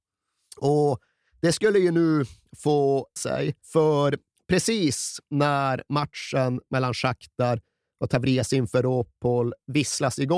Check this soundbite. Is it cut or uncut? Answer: cut